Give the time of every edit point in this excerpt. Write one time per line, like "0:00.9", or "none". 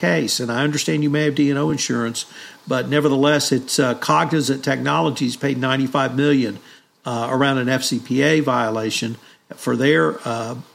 none